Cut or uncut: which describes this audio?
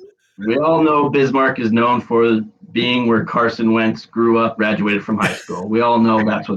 cut